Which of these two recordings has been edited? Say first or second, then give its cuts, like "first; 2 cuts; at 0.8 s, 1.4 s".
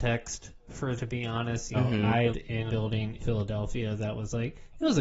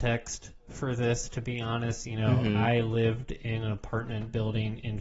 first; 5 cuts; at 1.0 s, 1.7 s, 2.3 s, 2.7 s, 3.2 s